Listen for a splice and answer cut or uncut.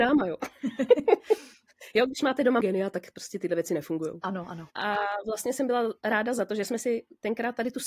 cut